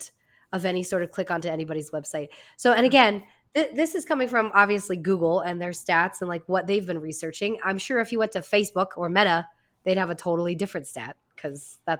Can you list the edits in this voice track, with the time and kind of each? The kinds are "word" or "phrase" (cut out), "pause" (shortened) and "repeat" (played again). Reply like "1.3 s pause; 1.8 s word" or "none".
none